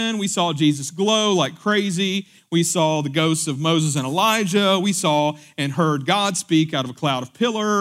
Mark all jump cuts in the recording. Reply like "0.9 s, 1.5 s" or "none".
none